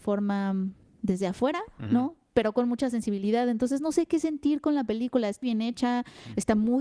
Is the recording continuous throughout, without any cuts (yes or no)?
no